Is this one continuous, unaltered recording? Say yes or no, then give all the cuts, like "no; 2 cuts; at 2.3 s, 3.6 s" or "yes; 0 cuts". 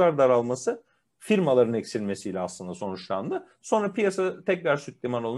yes; 0 cuts